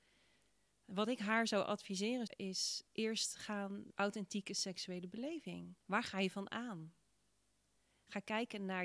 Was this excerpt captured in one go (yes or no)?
no